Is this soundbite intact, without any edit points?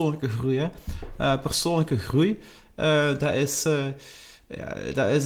yes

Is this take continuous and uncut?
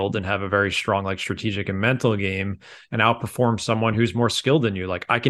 yes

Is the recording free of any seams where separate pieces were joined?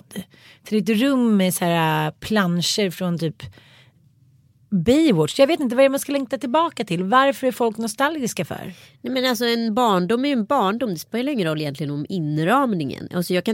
yes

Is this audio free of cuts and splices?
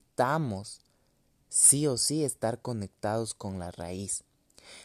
yes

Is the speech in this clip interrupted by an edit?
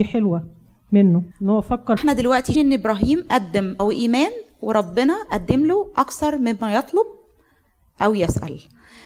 yes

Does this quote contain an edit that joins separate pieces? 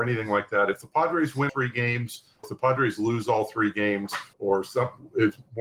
yes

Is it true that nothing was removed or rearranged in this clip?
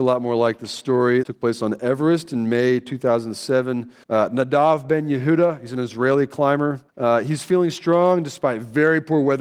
no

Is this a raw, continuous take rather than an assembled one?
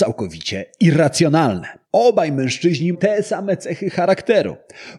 no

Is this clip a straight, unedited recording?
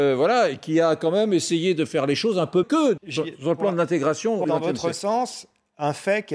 no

